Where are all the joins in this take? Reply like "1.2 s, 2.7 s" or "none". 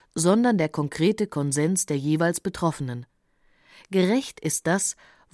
none